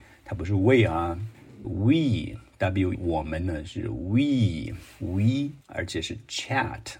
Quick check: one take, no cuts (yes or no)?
no